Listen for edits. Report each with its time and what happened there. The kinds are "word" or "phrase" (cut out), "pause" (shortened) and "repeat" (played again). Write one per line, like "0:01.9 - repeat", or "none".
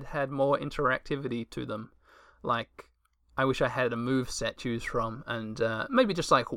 0:04.6 - word